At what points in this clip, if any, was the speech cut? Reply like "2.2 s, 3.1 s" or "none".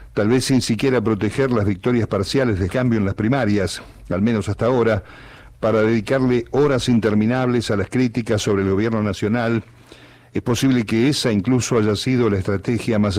2.7 s